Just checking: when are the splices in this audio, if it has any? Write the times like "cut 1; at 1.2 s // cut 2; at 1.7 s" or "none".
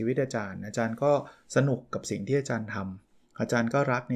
none